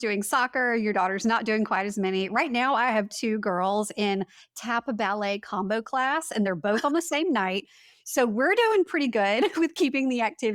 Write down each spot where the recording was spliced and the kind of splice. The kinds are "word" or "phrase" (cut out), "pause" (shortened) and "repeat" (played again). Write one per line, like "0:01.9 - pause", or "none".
none